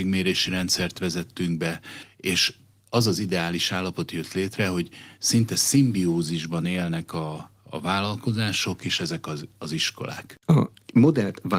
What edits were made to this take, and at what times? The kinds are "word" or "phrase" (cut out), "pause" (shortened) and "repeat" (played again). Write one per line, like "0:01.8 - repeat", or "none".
none